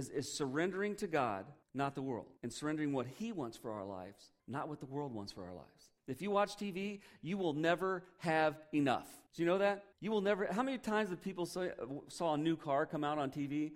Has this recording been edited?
yes; 6 cuts; at 1.6 s, 2.4 s, 4.4 s, 6.0 s, 9.3 s, 9.9 s

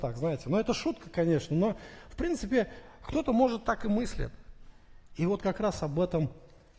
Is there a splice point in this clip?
no; 0 cuts

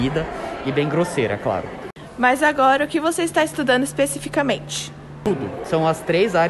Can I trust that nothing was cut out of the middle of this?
yes; 0 cuts

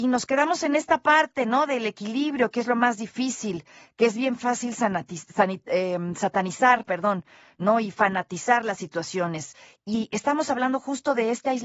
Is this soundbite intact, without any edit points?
yes; 0 cuts

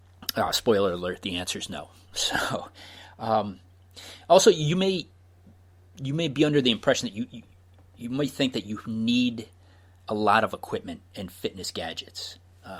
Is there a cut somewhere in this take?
no; 0 cuts

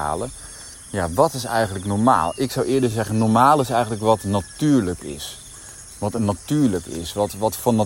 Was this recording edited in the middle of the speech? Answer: no; 0 cuts

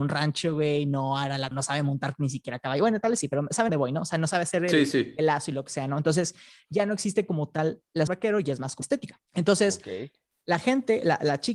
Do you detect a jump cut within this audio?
yes; 5 cuts; at 1.5 s, 3.7 s, 8.1 s, 8.8 s, 9.2 s

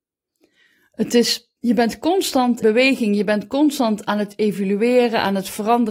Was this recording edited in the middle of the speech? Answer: yes; 2 cuts; at 1.6 s, 2.6 s

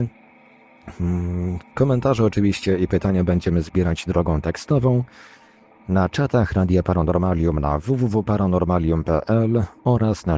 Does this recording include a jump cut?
no; 0 cuts

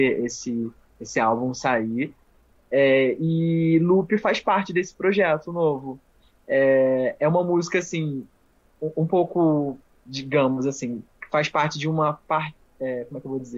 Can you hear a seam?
no; 0 cuts

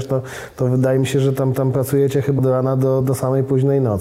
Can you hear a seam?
yes; 3 cuts; at 1.5 s, 2.4 s, 3.0 s

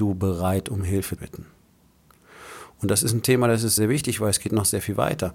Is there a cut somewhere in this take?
yes; 2 cuts; at 1.2 s, 3.8 s

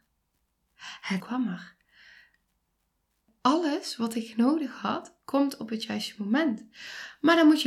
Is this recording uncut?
no; 1 cut; at 1.2 s

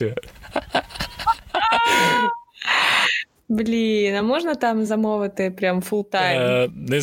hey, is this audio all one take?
yes; 0 cuts

